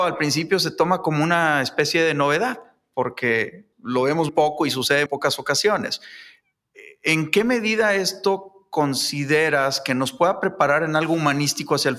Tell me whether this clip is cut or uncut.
cut